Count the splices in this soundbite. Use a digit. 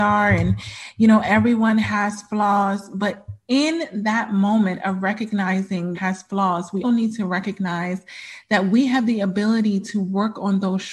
2